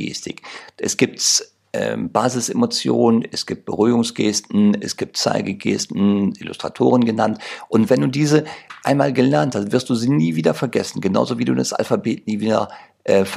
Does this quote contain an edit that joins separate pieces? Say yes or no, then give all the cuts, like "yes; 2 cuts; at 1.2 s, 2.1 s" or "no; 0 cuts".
no; 0 cuts